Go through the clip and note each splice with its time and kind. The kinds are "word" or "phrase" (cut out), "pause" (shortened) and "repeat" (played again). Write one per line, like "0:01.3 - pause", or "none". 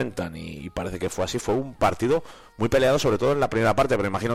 none